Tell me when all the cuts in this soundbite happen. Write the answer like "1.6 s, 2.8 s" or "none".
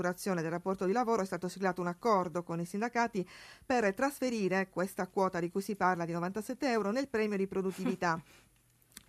none